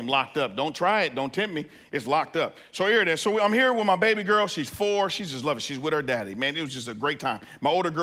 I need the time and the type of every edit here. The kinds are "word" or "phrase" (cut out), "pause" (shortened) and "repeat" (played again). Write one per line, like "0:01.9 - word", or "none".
none